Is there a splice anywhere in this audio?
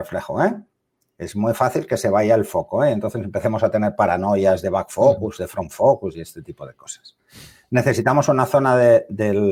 no; 0 cuts

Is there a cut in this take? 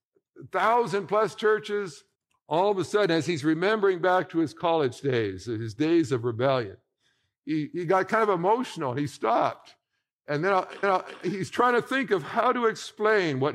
yes; 2 cuts; at 2.2 s, 10.8 s

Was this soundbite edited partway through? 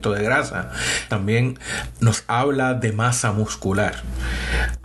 yes; 1 cut; at 1.1 s

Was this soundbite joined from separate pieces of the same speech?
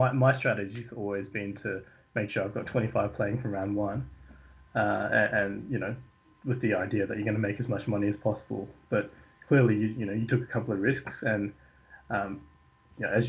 no; 0 cuts

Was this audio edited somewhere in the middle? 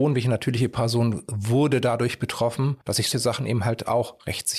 yes; 2 cuts; at 2.8 s, 3.1 s

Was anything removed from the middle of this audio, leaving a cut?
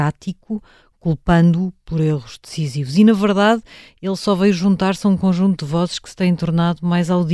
no; 0 cuts

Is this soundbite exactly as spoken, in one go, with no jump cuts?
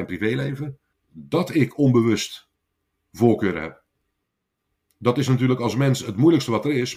yes; 0 cuts

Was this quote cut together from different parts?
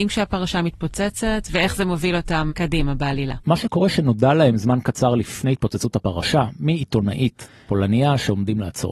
no; 0 cuts

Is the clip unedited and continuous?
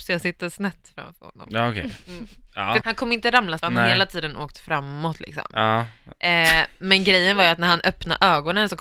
no; 2 cuts; at 2.8 s, 3.6 s

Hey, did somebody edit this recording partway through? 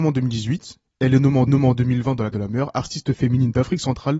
yes; 2 cuts; at 1.5 s, 2.3 s

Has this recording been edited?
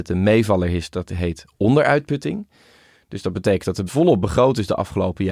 no; 0 cuts

